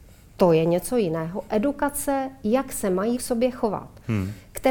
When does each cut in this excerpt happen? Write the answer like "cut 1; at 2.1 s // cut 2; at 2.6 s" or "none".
cut 1; at 3.1 s